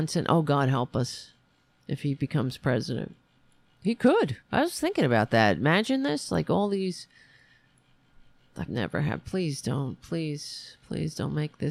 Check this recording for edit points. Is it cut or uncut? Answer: cut